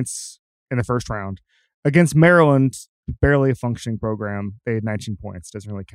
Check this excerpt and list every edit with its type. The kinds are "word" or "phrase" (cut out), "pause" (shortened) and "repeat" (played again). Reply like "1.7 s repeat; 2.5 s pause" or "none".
none